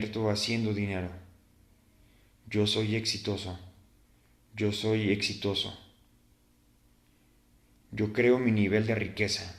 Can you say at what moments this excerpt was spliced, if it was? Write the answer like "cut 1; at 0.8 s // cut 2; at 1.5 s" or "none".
none